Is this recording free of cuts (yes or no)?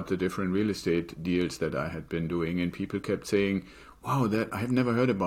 yes